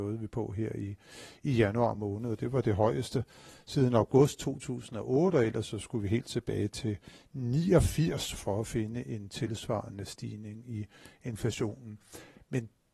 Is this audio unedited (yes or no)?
yes